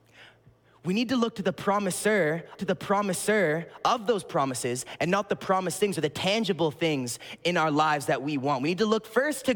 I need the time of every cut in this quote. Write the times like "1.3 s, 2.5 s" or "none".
2.6 s, 7.4 s